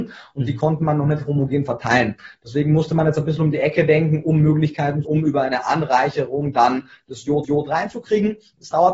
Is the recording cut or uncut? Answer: cut